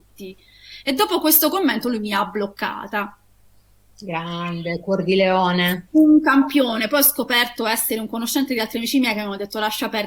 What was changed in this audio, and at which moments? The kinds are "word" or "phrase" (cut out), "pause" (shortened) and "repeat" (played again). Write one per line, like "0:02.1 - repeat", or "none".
none